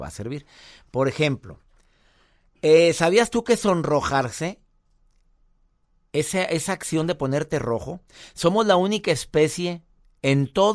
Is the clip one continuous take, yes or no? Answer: yes